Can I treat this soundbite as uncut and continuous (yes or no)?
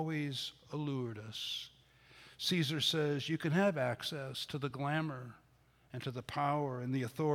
yes